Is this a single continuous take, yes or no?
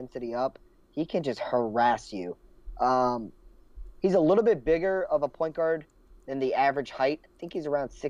yes